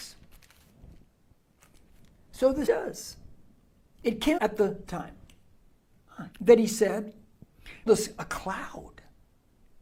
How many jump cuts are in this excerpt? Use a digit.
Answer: 5